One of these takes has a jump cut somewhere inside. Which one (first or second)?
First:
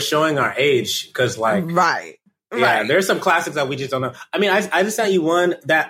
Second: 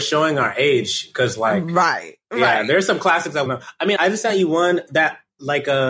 second